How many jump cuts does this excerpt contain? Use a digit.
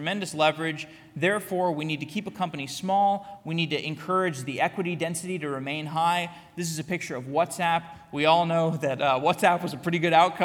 0